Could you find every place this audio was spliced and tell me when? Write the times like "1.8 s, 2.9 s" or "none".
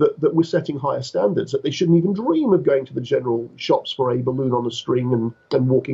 none